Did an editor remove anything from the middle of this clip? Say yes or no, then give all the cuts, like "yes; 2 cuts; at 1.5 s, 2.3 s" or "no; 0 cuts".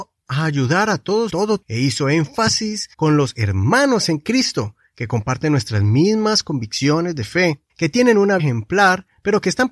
yes; 5 cuts; at 1.3 s, 1.6 s, 2.9 s, 7.7 s, 8.4 s